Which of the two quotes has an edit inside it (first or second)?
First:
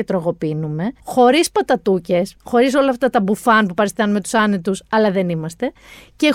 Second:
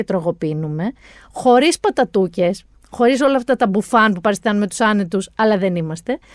first